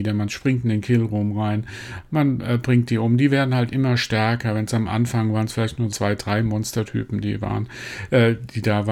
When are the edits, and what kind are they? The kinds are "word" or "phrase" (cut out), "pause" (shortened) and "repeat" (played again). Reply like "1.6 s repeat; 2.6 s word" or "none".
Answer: 5.9 s word